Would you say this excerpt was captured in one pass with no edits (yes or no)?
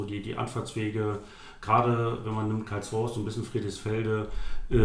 yes